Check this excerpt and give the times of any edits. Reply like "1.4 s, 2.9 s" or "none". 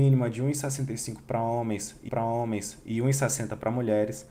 2.1 s